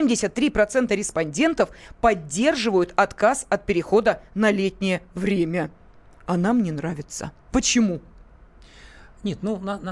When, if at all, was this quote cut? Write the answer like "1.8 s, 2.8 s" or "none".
7.4 s

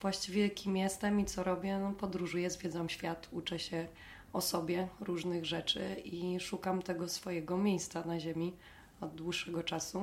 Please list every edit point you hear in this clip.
none

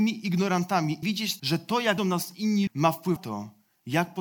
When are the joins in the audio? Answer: 1.0 s, 1.4 s, 2.0 s, 2.7 s, 3.2 s

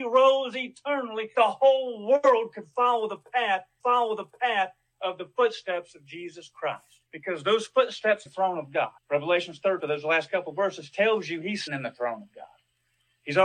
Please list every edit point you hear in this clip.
1.3 s, 3.8 s, 7.1 s, 8.3 s, 9.0 s, 9.8 s, 11.7 s

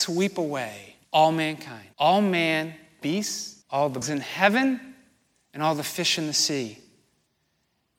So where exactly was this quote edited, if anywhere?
1.0 s, 1.9 s, 3.0 s, 3.6 s, 4.0 s

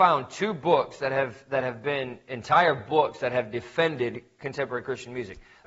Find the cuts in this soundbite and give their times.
none

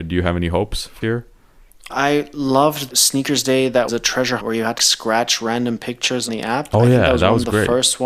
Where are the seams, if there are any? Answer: 1.0 s, 1.9 s, 2.9 s, 3.9 s, 4.4 s, 4.8 s, 6.3 s

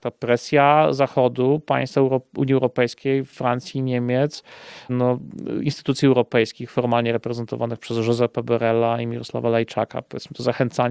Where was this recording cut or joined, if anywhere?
4.9 s

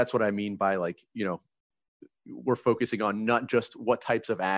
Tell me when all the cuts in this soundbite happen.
none

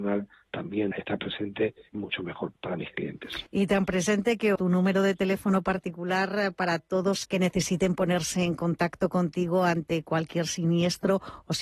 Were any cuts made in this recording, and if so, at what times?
0.9 s, 1.9 s, 2.5 s, 3.5 s, 4.6 s, 7.2 s

